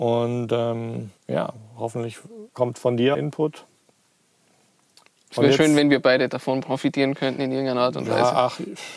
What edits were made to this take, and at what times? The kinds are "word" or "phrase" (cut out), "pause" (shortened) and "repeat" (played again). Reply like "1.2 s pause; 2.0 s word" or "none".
1.2 s pause; 2.5 s pause; 3.1 s phrase